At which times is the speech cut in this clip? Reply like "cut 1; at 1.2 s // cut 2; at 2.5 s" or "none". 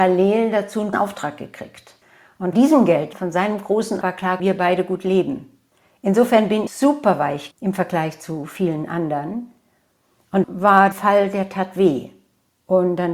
cut 1; at 0.9 s // cut 2; at 2.5 s // cut 3; at 3.1 s // cut 4; at 4.0 s // cut 5; at 4.4 s // cut 6; at 6.7 s // cut 7; at 7.5 s // cut 8; at 10.4 s // cut 9; at 10.9 s